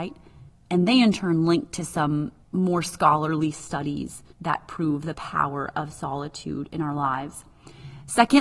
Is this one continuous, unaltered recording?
no; 2 cuts; at 2.4 s, 4.3 s

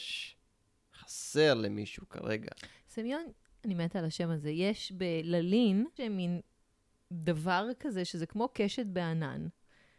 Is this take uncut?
no; 1 cut; at 6.0 s

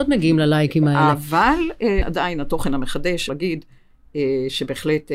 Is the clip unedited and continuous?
no; 2 cuts; at 2.0 s, 3.3 s

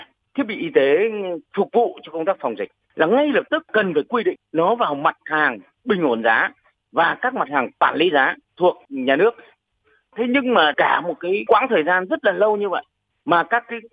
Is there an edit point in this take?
no; 0 cuts

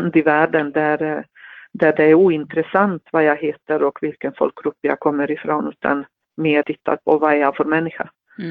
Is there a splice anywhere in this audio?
yes; 1 cut; at 6.6 s

